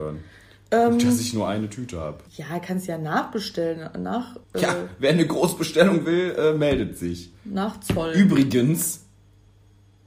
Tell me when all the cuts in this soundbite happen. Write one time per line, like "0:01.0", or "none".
0:02.3
0:04.4